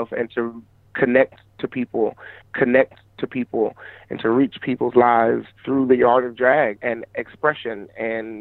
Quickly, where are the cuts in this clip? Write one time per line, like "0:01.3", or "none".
0:02.4
0:05.5
0:06.8